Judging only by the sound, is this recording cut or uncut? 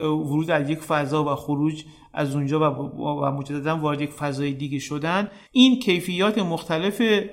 cut